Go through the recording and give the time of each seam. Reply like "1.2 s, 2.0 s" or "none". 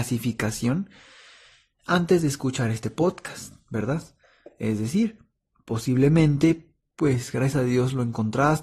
none

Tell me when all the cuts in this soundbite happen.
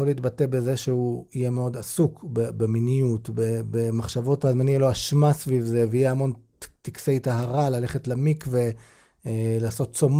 4.4 s

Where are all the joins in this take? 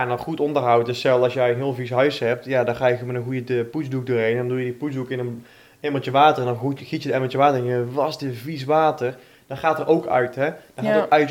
none

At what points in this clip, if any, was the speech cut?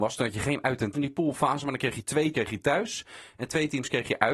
0.9 s, 2.3 s

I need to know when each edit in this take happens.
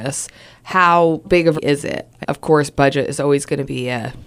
1.2 s, 1.6 s, 2.2 s

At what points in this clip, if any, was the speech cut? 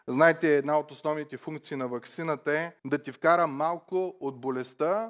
2.8 s

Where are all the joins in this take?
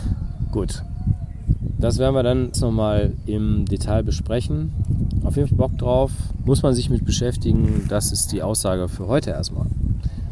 2.5 s, 5.5 s

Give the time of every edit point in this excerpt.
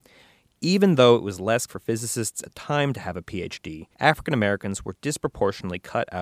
1.7 s, 2.4 s, 3.9 s

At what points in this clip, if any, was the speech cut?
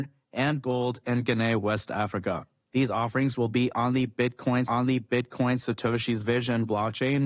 4.7 s

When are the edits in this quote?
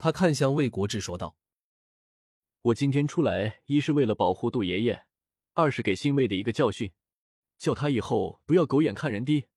none

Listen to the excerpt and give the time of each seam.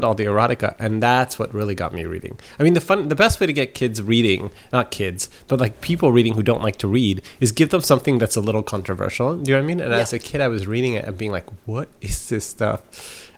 none

